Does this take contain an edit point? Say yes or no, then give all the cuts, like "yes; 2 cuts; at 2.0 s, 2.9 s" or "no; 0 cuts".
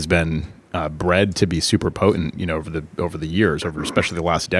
no; 0 cuts